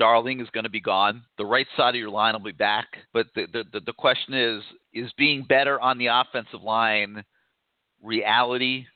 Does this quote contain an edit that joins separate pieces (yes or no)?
yes